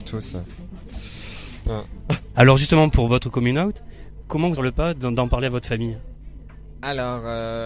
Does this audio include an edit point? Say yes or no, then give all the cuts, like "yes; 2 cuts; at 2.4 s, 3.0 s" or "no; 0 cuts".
yes; 2 cuts; at 4.2 s, 4.6 s